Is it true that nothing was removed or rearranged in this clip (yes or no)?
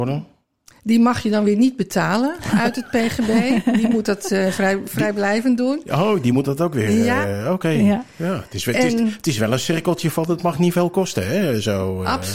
yes